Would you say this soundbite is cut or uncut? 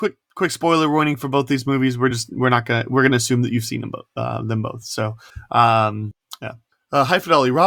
uncut